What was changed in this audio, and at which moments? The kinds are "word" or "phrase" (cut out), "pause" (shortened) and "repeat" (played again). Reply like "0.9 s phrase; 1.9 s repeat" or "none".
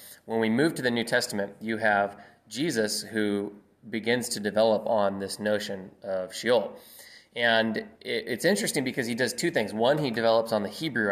none

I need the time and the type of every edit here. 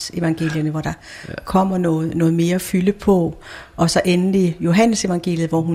none

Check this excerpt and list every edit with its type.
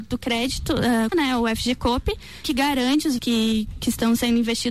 1.1 s word; 2.4 s word; 3.2 s word

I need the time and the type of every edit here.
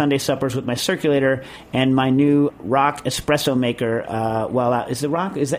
2.5 s word

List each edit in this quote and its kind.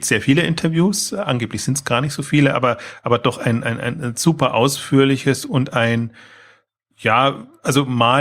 none

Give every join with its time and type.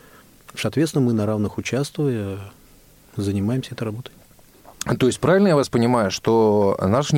none

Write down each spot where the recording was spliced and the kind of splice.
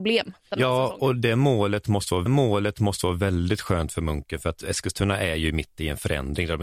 2.3 s repeat

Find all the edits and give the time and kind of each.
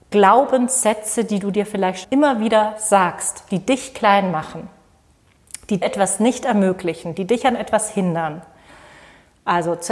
2.0 s word; 5.8 s word

